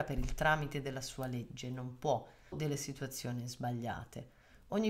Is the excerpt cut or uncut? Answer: cut